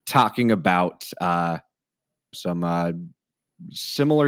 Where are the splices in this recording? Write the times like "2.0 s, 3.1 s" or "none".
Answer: 2.3 s